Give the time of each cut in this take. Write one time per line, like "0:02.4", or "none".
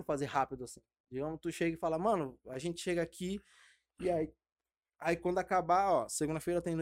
none